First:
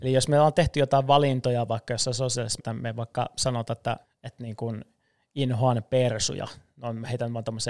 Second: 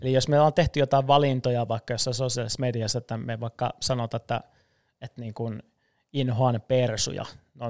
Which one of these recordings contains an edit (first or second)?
first